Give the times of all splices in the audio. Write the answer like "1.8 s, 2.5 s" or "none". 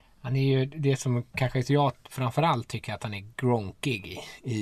3.3 s